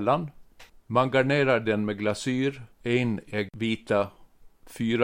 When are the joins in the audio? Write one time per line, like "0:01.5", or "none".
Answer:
0:02.7